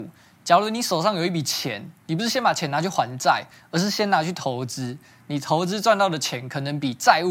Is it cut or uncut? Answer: uncut